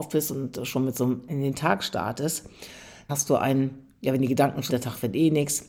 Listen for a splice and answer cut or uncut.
cut